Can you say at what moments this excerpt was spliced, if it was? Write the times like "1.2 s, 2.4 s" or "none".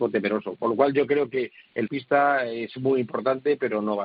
1.9 s